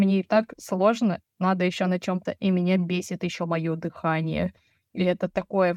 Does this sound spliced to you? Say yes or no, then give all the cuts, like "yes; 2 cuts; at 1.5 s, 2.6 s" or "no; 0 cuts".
yes; 1 cut; at 2.3 s